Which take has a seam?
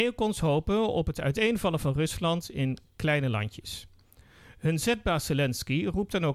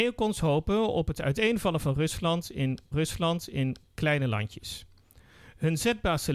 second; 1 cut; at 2.9 s

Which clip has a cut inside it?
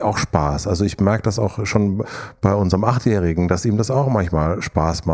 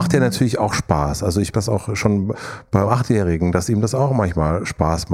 second; 2 cuts; at 1.5 s, 2.8 s

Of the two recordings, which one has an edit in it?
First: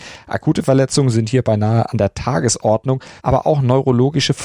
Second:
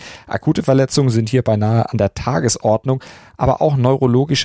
first; 1 cut; at 3.2 s

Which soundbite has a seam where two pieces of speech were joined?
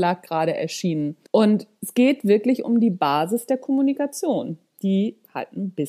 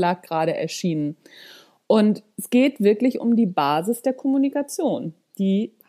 first; 1 cut; at 1.3 s

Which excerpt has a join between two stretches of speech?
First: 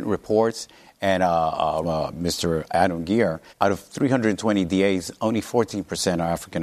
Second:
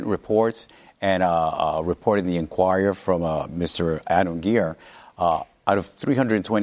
first; 2 cuts; at 1.8 s, 3.5 s

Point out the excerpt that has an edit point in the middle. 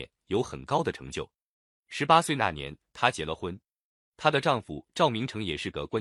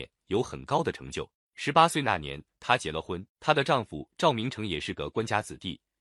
second; 2 cuts; at 1.4 s, 3.3 s

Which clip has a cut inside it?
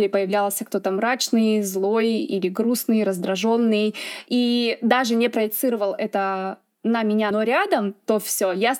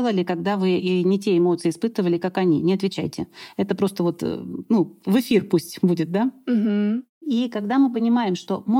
first; 1 cut; at 7.3 s

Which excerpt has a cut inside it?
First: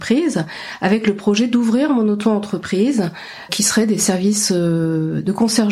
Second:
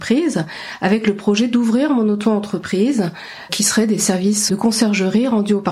second; 1 cut; at 4.5 s

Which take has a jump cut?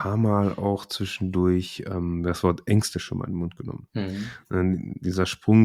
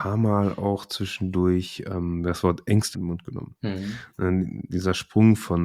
second; 1 cut; at 2.9 s

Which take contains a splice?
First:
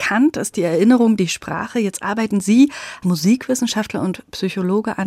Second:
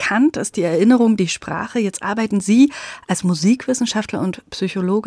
first; 1 cut; at 3.0 s

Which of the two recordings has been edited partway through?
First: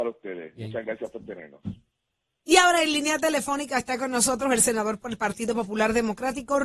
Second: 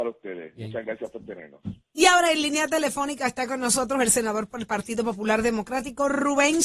second; 1 cut; at 1.8 s

